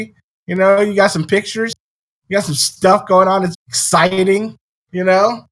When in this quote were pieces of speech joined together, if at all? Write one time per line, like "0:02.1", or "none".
0:03.5